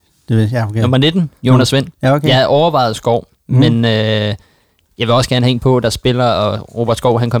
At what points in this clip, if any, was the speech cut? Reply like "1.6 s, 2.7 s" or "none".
none